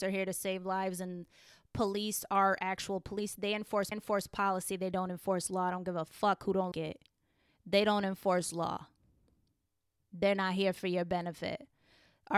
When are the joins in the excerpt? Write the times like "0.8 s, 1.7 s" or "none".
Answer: 3.9 s, 6.7 s

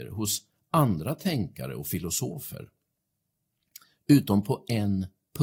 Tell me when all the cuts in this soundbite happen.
none

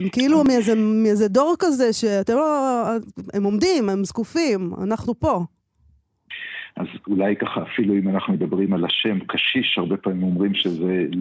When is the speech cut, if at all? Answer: none

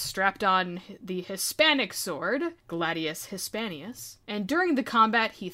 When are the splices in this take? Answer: 2.6 s, 4.2 s

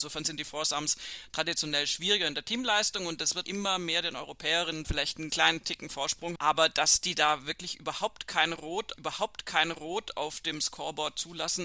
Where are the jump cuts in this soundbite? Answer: 3.4 s, 4.8 s, 5.3 s, 6.4 s, 9.0 s

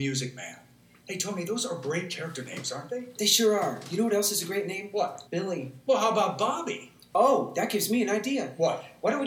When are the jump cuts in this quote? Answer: 5.3 s

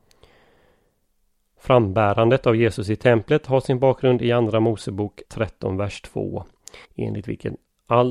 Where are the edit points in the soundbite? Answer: 5.3 s, 6.8 s

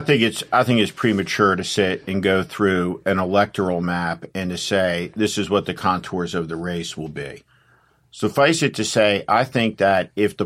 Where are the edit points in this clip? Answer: none

